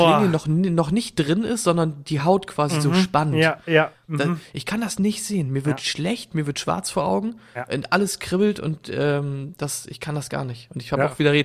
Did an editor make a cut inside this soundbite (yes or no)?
no